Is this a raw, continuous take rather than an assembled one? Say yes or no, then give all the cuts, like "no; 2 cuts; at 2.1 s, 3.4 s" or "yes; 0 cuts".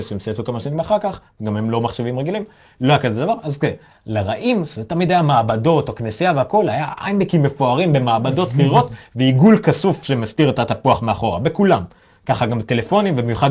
yes; 0 cuts